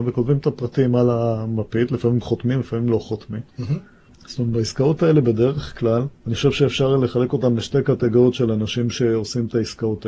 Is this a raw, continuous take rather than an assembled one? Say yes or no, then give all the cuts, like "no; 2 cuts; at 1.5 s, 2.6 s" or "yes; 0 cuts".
no; 2 cuts; at 4.1 s, 6.2 s